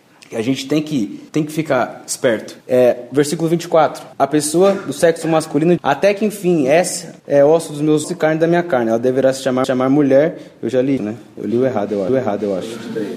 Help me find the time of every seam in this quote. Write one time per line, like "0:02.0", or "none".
0:01.3
0:02.6
0:04.1
0:05.8
0:07.2
0:08.0
0:09.6
0:11.0
0:12.1

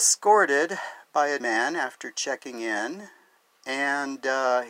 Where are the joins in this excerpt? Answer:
0:01.4

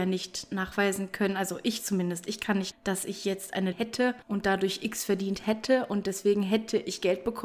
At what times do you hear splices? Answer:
0:02.7
0:03.7
0:04.2

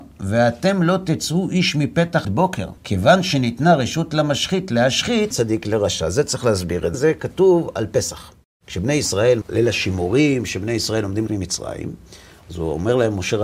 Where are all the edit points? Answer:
0:02.2
0:02.8
0:05.3
0:06.9
0:08.4
0:09.4
0:11.3

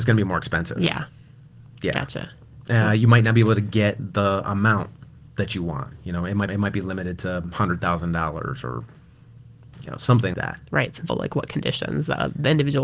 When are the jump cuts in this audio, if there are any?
0:06.5
0:10.3
0:11.1

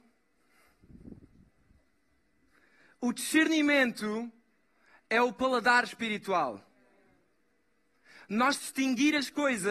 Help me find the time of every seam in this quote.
0:08.6

